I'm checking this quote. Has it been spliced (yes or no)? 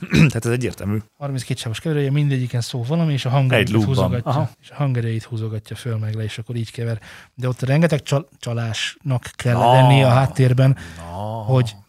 yes